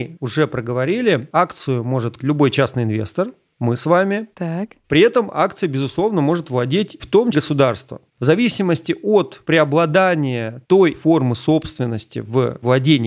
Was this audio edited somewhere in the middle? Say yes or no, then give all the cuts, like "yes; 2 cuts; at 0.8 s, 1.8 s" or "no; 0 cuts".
yes; 6 cuts; at 2.2 s, 4.3 s, 7.0 s, 7.3 s, 8.1 s, 10.9 s